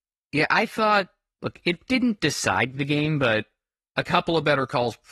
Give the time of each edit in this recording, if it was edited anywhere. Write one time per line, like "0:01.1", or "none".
none